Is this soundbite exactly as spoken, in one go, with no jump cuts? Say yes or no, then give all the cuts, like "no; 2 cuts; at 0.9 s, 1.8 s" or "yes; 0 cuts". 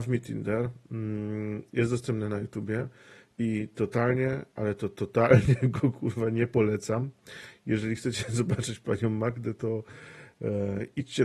yes; 0 cuts